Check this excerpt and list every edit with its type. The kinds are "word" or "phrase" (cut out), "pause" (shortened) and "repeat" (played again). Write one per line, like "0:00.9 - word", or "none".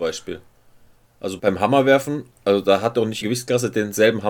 0:01.4 - word
0:03.2 - word